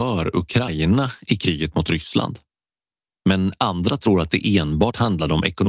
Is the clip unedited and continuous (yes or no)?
yes